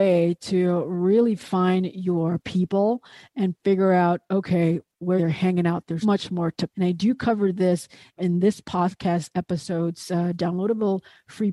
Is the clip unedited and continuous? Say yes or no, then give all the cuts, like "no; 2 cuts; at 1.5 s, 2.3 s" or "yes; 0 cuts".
no; 4 cuts; at 5.2 s, 6.0 s, 6.7 s, 8.2 s